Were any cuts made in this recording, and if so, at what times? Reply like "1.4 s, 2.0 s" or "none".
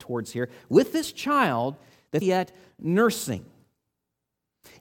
2.2 s